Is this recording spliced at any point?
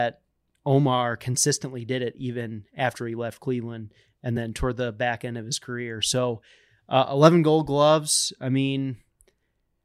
no; 0 cuts

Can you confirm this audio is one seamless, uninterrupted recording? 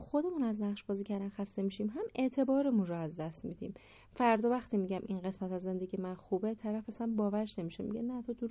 yes; 0 cuts

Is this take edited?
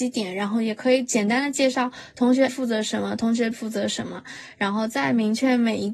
yes; 2 cuts; at 2.5 s, 3.5 s

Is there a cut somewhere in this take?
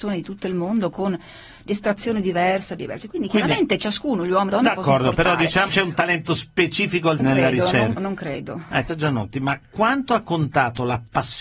yes; 6 cuts; at 2.8 s, 4.5 s, 5.7 s, 7.2 s, 8.0 s, 8.9 s

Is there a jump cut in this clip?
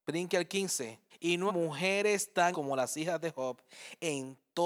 yes; 3 cuts; at 1.1 s, 1.5 s, 2.5 s

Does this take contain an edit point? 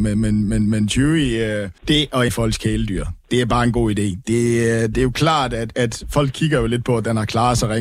yes; 2 cuts; at 1.8 s, 2.3 s

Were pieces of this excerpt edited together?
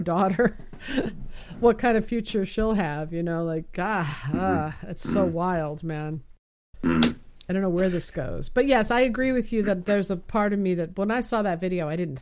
no; 0 cuts

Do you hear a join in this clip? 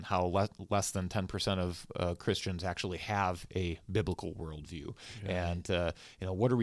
no; 0 cuts

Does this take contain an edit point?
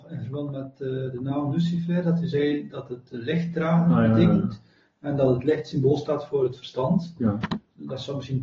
no; 0 cuts

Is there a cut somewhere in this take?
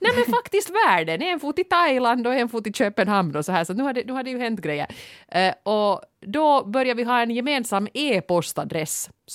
no; 0 cuts

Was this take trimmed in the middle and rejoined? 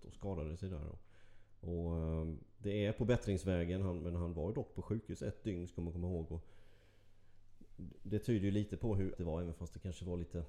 yes; 1 cut; at 9.1 s

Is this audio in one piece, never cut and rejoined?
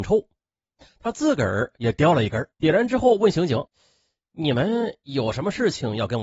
no; 2 cuts; at 2.5 s, 3.7 s

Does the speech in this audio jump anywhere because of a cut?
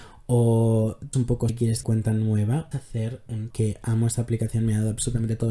yes; 5 cuts; at 1.1 s, 1.5 s, 1.8 s, 2.7 s, 3.5 s

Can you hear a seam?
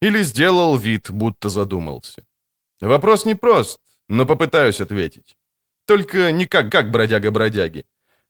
yes; 1 cut; at 6.7 s

